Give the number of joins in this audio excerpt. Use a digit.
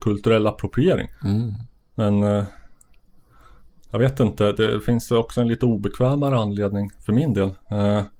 0